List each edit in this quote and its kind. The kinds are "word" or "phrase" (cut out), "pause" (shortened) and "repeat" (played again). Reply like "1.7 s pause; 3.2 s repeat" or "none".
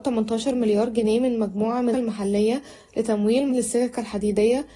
1.9 s word; 3.5 s word